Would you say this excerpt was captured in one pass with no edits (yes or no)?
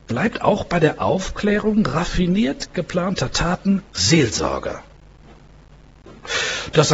no